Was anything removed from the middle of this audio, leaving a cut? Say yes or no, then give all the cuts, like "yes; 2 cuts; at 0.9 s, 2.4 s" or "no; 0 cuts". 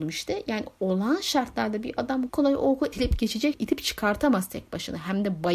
yes; 3 cuts; at 2.3 s, 2.9 s, 3.5 s